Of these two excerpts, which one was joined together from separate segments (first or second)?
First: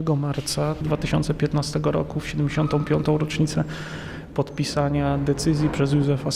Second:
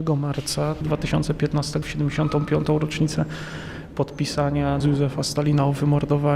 second